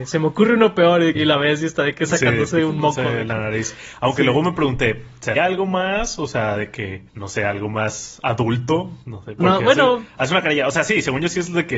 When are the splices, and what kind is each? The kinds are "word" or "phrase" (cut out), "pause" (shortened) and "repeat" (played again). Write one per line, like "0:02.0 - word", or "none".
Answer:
0:01.1 - word
0:05.4 - word
0:07.1 - pause
0:09.0 - pause
0:09.4 - word